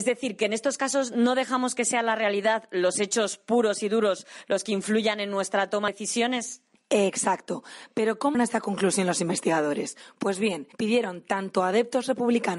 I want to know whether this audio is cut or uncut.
cut